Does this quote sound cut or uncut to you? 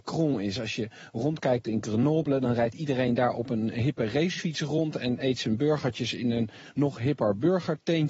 uncut